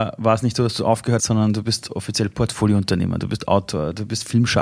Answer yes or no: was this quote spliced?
yes